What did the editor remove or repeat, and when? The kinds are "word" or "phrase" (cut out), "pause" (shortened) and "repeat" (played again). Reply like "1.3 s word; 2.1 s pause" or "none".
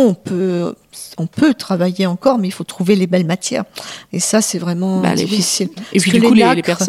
none